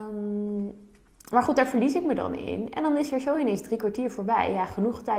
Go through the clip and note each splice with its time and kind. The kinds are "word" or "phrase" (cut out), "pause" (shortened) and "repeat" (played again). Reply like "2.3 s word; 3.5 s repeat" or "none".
none